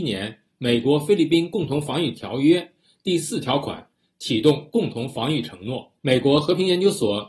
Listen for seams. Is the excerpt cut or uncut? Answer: cut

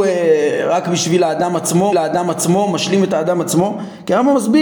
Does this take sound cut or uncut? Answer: cut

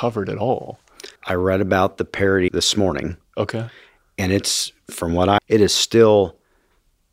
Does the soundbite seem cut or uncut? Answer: cut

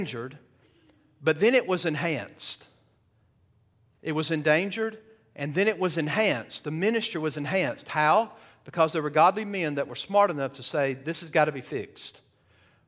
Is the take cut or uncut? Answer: uncut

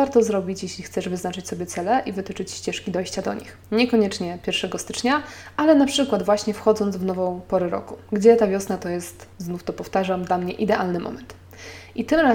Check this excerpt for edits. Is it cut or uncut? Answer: cut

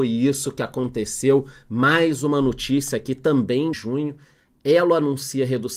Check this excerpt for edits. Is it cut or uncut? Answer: cut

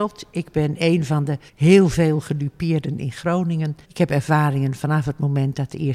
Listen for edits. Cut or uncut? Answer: cut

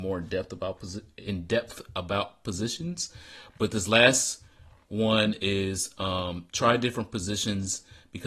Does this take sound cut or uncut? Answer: uncut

